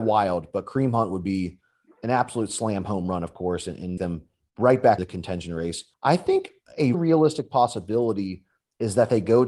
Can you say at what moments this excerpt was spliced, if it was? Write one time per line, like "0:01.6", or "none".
0:04.0
0:05.0
0:05.9
0:06.9